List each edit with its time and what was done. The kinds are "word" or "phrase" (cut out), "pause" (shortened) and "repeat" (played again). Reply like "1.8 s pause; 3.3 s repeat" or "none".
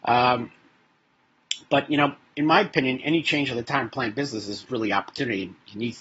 4.7 s phrase